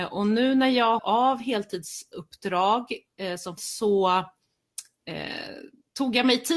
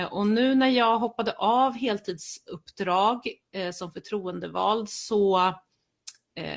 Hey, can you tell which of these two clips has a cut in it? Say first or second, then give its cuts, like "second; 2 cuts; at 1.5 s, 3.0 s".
first; 2 cuts; at 1.0 s, 3.6 s